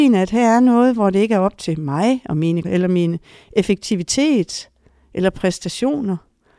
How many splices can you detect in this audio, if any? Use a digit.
1